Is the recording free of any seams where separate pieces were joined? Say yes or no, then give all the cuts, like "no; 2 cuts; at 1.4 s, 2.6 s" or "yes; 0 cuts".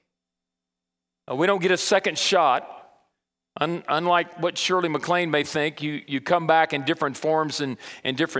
yes; 0 cuts